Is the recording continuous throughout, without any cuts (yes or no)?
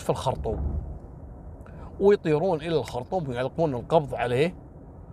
yes